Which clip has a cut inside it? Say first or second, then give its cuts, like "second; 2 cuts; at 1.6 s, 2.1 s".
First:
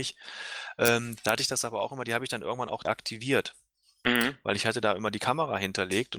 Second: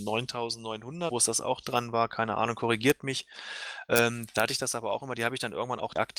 second; 1 cut; at 1.1 s